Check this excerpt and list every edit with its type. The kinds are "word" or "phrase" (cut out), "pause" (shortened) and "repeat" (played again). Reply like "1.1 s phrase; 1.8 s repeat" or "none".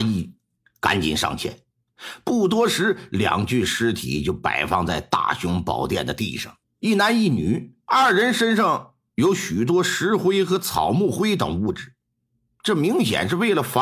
6.6 s pause; 7.8 s pause